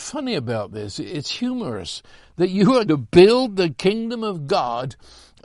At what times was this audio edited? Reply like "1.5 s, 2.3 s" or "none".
2.9 s